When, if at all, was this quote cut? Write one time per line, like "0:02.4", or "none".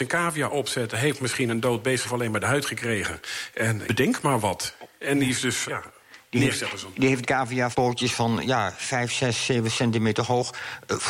0:02.0
0:03.9
0:05.7
0:07.2
0:07.7